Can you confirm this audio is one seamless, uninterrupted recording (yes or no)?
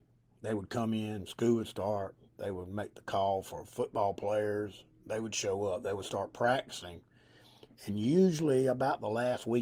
no